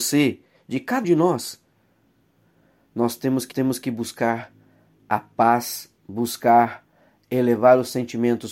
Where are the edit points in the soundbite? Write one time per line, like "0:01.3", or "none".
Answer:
0:01.0
0:03.5
0:06.0